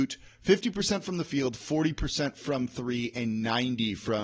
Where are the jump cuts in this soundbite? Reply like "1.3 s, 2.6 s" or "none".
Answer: none